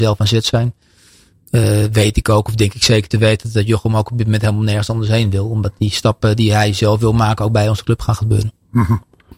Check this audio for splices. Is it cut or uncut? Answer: uncut